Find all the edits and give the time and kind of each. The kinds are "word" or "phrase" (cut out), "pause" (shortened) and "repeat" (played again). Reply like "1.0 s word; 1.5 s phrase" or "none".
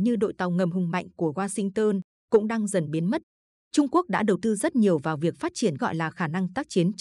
5.8 s word